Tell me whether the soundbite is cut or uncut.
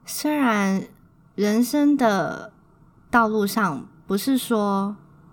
uncut